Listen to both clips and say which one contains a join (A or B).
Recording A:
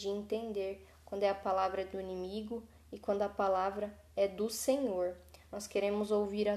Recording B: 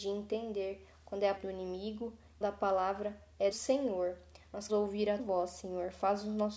B